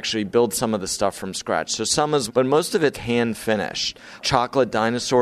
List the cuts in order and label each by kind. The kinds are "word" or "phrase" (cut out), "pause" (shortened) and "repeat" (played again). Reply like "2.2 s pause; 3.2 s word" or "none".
2.3 s word; 2.9 s word